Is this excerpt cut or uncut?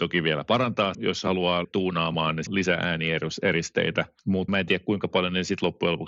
cut